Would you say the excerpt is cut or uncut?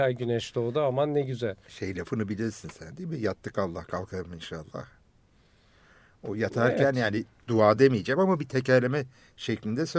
uncut